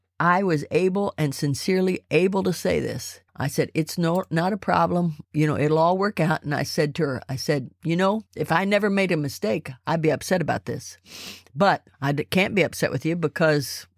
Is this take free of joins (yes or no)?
no